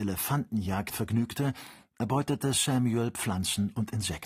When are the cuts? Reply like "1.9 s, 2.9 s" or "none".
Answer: none